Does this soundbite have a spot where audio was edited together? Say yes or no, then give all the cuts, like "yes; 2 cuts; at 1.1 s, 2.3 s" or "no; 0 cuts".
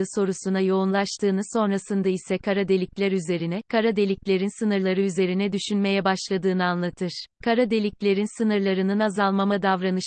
yes; 1 cut; at 7.3 s